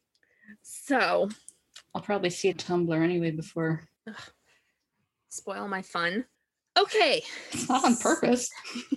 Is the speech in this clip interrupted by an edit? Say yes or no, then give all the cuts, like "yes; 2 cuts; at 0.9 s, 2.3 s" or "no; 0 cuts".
yes; 3 cuts; at 2.5 s, 4.0 s, 6.3 s